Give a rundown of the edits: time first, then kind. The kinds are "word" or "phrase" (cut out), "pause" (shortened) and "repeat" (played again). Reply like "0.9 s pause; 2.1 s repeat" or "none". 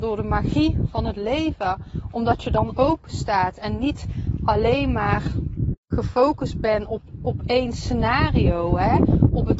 5.8 s pause